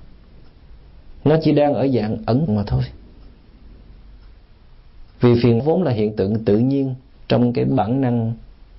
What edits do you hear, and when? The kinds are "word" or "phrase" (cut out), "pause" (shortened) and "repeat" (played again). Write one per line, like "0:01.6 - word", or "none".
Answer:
0:02.5 - word
0:05.1 - pause
0:05.6 - word